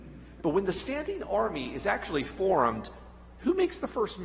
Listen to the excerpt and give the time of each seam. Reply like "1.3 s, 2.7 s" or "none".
none